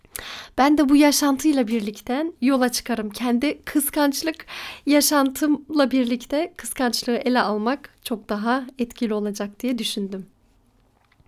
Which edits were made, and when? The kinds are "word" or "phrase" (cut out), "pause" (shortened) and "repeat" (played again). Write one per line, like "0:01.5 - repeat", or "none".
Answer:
0:02.4 - pause

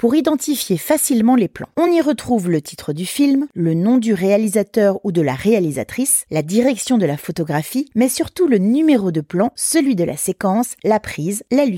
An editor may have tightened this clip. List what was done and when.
none

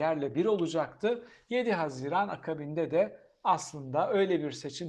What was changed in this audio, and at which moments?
none

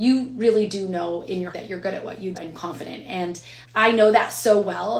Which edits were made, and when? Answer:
0:01.5 - word
0:02.3 - word
0:03.6 - word

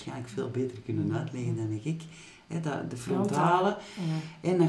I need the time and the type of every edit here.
none

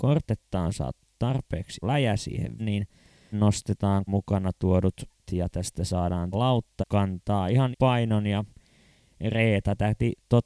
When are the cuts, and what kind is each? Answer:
0:01.8 - word
0:02.6 - word
0:03.3 - word
0:04.1 - word
0:05.2 - word
0:06.3 - word
0:06.8 - word
0:07.7 - word

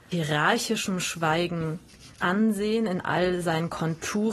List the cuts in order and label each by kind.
0:02.1 - pause

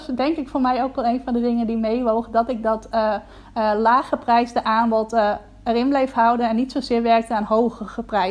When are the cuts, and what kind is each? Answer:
none

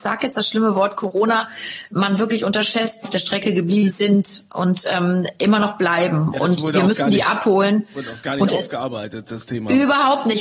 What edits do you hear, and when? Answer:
0:01.9 - word
0:03.0 - phrase

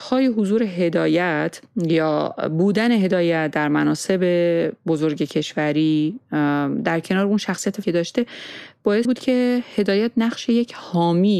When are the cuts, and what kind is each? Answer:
0:07.8 - word
0:09.0 - word

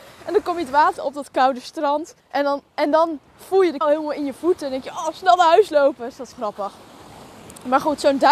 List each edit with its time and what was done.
0:01.0 - word
0:02.2 - pause
0:03.3 - pause
0:03.8 - word
0:06.3 - word

